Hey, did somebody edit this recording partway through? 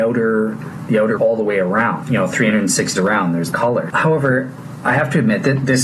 yes; 3 cuts; at 1.2 s, 3.0 s, 3.5 s

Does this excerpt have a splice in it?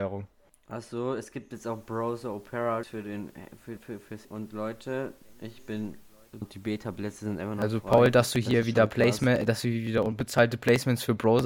yes; 4 cuts; at 2.8 s, 3.8 s, 4.2 s, 6.4 s

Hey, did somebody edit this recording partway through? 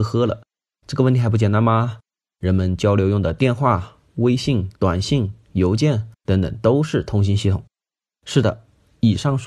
yes; 2 cuts; at 4.8 s, 6.2 s

